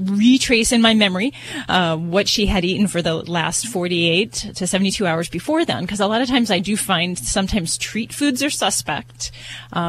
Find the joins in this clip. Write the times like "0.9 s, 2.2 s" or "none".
none